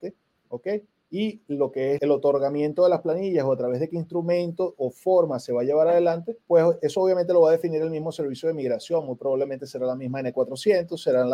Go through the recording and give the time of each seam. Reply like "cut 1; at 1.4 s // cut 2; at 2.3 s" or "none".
cut 1; at 2.0 s // cut 2; at 6.4 s